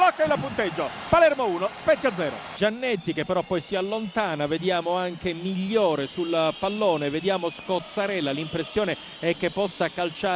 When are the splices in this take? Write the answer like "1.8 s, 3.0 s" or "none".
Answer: none